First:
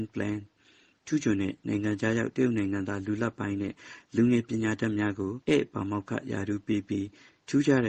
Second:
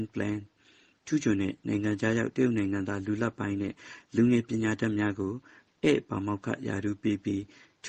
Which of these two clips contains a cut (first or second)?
first